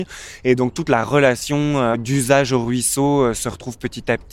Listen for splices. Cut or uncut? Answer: uncut